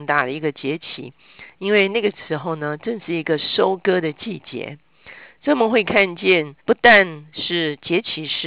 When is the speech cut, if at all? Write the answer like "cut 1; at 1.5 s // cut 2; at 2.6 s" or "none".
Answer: cut 1; at 6.6 s